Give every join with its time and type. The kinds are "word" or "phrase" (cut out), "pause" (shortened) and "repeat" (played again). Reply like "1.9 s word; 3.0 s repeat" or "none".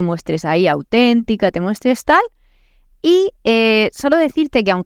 3.3 s pause

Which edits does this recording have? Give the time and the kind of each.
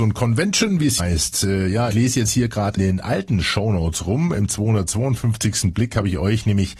1.0 s word; 1.9 s word; 2.8 s word

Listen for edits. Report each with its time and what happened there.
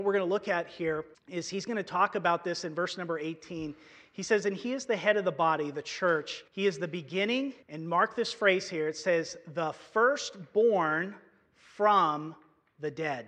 1.1 s pause; 6.5 s pause; 7.6 s pause

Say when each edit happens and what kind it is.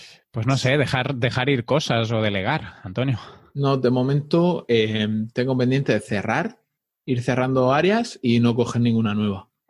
none

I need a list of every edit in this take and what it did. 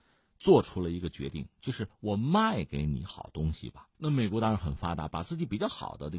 3.9 s pause

